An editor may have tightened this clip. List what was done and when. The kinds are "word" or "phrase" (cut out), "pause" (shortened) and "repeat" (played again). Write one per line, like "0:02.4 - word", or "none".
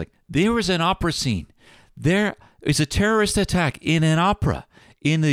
none